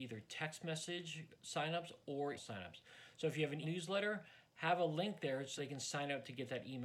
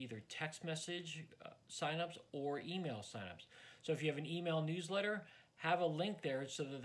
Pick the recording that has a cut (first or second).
first